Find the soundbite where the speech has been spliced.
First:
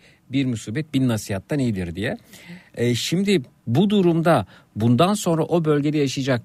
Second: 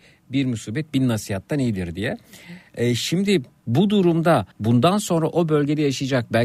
second; 1 cut; at 4.5 s

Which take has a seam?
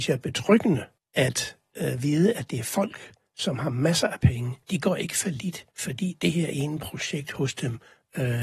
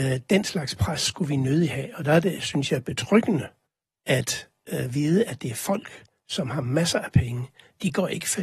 first; 3 cuts; at 1.0 s, 4.6 s, 5.7 s

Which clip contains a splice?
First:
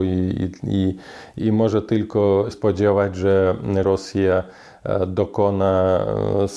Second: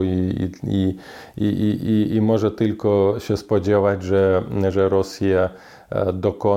first; 3 cuts; at 1.4 s, 2.5 s, 3.8 s

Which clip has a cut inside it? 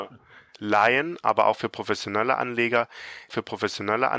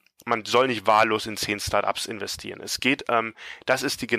first; 1 cut; at 3.3 s

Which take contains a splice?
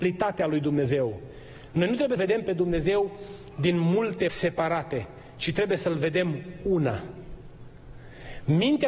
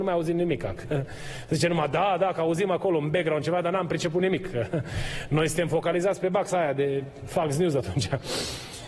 first; 2 cuts; at 2.2 s, 4.3 s

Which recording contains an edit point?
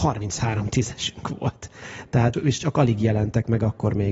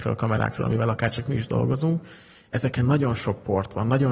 first; 1 cut; at 2.3 s

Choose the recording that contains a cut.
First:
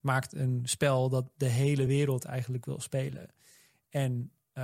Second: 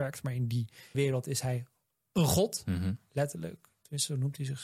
second; 1 cut; at 0.9 s

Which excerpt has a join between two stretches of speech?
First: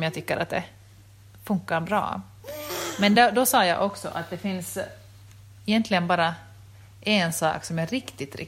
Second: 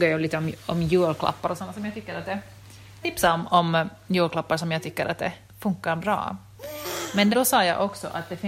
second; 3 cuts; at 3.0 s, 5.5 s, 7.3 s

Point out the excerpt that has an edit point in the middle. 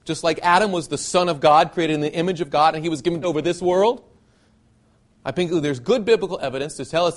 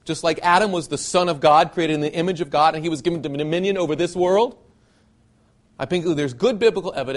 first; 1 cut; at 3.2 s

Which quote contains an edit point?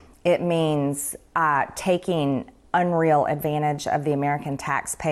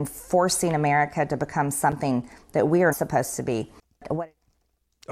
second; 1 cut; at 2.9 s

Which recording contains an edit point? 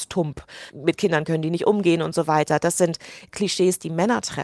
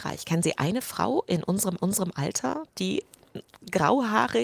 second; 1 cut; at 1.8 s

